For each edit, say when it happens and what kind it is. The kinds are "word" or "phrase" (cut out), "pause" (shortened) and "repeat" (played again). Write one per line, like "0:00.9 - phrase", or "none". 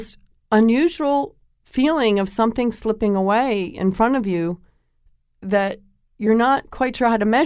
none